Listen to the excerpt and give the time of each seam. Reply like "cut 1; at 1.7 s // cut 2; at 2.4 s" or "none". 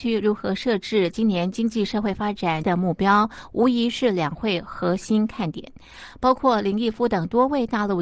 cut 1; at 2.6 s

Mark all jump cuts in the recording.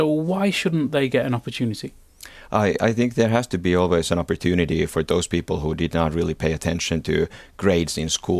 none

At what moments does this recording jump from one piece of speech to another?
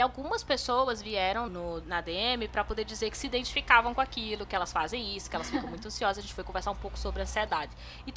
cut 1; at 1.5 s

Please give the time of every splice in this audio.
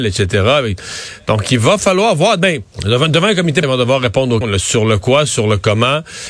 cut 1; at 2.7 s // cut 2; at 3.6 s // cut 3; at 4.4 s

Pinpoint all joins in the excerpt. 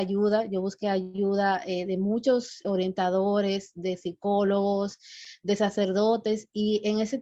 cut 1; at 2.6 s

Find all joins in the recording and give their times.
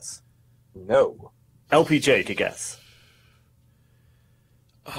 cut 1; at 2.2 s

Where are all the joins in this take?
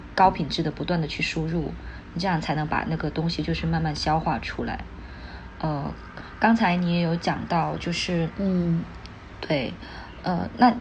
none

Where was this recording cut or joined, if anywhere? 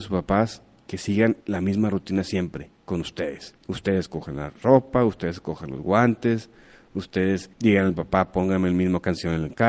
cut 1; at 1.4 s // cut 2; at 2.7 s // cut 3; at 3.6 s // cut 4; at 7.5 s

